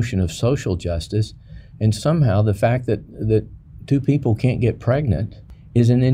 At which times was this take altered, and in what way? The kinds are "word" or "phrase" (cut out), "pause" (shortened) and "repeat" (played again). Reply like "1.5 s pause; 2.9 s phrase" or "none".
2.0 s word